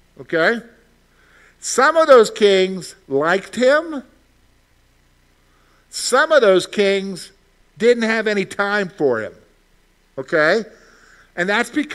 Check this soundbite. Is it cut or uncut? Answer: uncut